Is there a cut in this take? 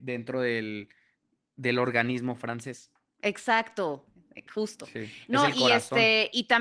no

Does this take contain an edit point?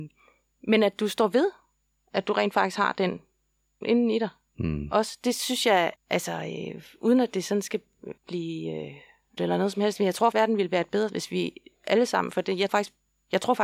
yes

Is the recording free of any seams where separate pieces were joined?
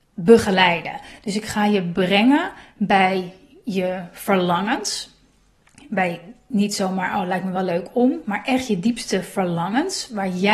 yes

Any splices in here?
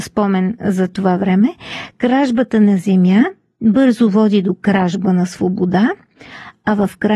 no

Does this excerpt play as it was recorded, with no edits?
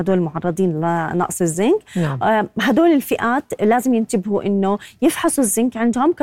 yes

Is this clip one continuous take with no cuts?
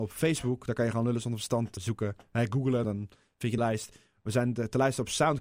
no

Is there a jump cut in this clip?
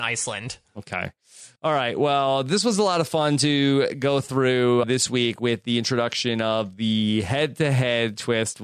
yes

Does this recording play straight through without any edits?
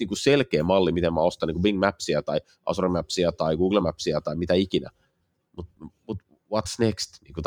yes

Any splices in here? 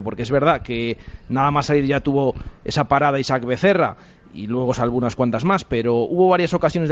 no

